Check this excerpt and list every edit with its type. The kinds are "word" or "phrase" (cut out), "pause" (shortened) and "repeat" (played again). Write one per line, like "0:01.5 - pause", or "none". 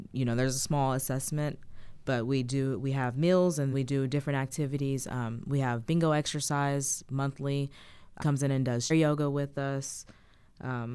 0:03.7 - word
0:08.2 - phrase
0:08.9 - word